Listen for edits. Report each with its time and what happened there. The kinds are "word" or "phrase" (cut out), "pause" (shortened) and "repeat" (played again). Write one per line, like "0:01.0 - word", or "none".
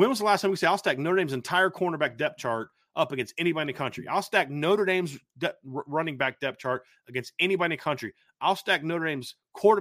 none